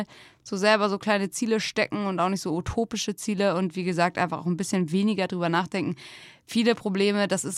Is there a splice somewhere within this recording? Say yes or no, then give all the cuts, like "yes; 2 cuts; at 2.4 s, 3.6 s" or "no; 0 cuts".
no; 0 cuts